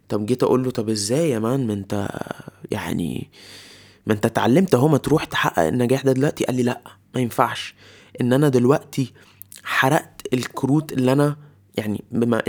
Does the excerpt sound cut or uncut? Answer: uncut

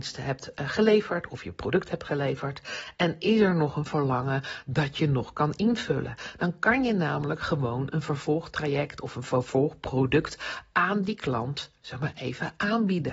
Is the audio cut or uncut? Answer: uncut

